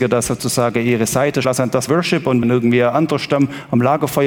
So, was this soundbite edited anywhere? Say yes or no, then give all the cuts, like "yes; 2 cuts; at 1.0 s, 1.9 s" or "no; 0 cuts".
yes; 3 cuts; at 1.4 s, 1.9 s, 2.4 s